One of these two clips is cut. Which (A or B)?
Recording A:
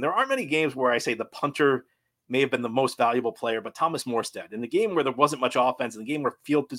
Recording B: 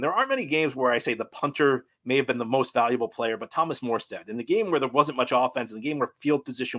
B